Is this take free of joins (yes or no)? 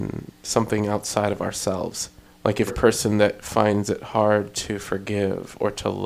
no